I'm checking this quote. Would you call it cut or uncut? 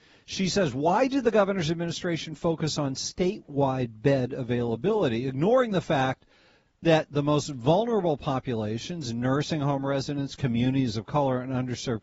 uncut